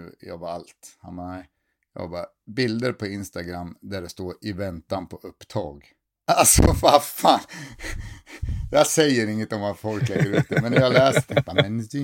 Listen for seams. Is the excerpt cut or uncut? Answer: uncut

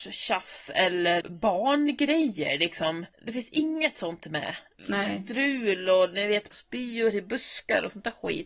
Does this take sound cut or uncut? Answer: cut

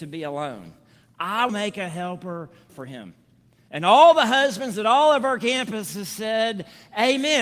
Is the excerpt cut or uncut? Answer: cut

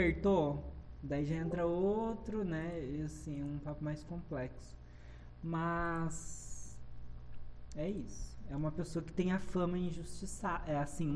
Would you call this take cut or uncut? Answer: uncut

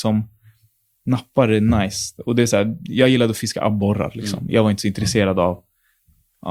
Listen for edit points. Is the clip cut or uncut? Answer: uncut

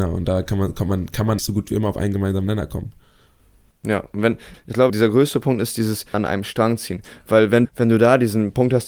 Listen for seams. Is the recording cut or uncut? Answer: cut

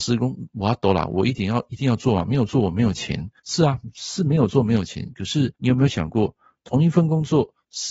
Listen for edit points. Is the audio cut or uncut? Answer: cut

